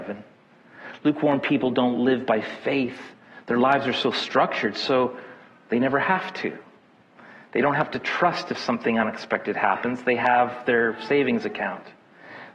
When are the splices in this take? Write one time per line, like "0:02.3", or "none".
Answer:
none

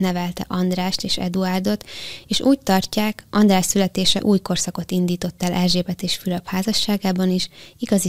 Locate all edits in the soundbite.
none

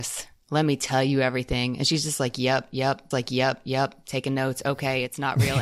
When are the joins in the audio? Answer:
0:03.1

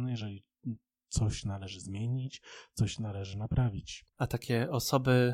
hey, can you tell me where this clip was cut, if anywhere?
0:04.1

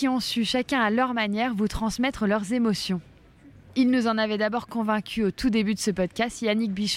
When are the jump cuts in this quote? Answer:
none

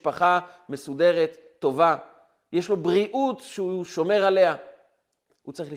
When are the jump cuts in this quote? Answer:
none

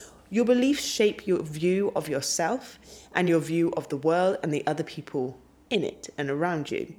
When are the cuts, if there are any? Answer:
none

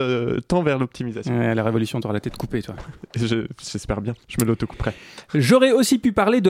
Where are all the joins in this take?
none

